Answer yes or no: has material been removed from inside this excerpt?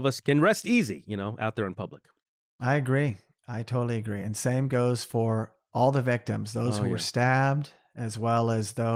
no